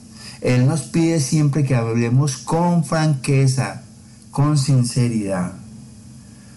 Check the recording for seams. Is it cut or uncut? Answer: uncut